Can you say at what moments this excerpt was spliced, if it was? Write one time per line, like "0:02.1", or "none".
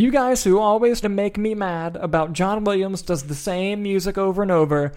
0:01.0
0:03.0